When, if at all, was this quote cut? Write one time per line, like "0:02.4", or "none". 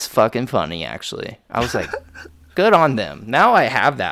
none